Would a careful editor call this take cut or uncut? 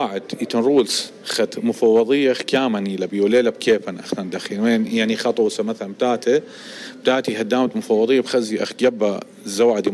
uncut